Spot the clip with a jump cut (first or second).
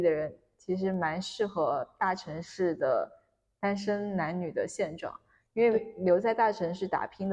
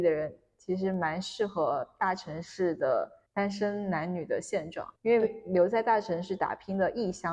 second